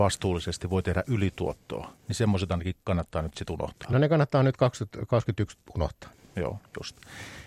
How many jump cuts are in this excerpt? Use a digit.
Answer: 0